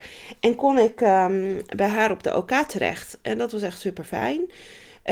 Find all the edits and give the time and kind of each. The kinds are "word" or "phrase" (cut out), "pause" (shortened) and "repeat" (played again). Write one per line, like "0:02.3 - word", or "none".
none